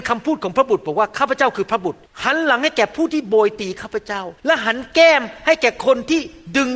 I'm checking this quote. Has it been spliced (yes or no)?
yes